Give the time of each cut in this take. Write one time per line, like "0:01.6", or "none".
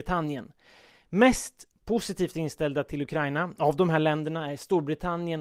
none